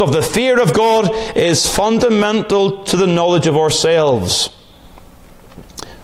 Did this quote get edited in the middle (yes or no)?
no